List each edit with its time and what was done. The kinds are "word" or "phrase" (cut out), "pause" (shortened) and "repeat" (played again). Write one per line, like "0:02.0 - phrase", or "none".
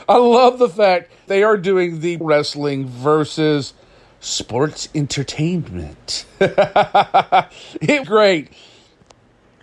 0:01.3 - word
0:02.2 - word
0:08.0 - word